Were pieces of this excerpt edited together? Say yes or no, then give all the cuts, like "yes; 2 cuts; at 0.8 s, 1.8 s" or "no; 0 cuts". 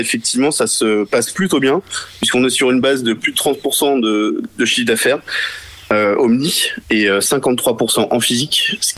no; 0 cuts